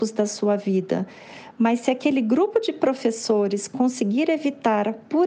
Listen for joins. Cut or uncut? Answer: uncut